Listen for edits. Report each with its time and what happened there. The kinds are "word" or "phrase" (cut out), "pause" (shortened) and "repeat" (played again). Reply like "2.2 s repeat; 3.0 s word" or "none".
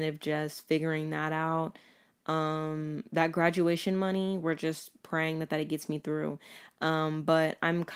none